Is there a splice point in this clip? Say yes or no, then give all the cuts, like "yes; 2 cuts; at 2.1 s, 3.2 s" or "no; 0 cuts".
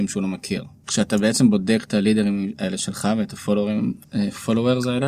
no; 0 cuts